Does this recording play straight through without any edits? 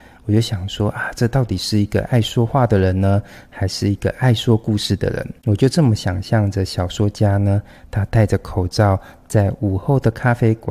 no; 1 cut; at 5.4 s

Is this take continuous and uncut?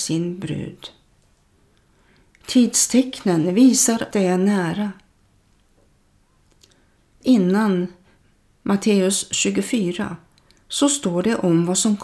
no; 2 cuts; at 4.1 s, 7.2 s

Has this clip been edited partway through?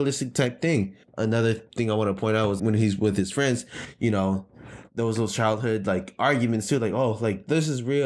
yes; 1 cut; at 2.6 s

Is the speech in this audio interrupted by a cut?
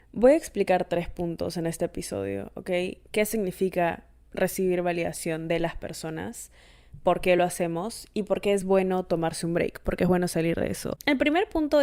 no; 0 cuts

